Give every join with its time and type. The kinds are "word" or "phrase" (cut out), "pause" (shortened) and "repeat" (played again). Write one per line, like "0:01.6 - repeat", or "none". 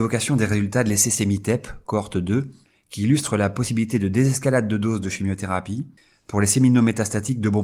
none